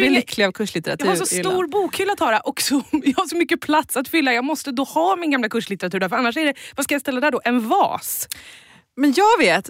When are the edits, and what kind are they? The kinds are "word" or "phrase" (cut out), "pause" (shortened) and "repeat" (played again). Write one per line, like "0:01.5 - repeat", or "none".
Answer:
none